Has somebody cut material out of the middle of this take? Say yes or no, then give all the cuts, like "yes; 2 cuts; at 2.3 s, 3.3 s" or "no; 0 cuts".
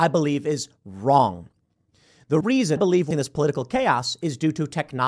yes; 3 cuts; at 2.4 s, 2.8 s, 3.1 s